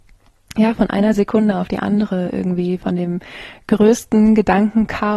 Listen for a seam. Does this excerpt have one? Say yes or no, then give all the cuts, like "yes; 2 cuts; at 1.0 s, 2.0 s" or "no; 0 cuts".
yes; 1 cut; at 2.8 s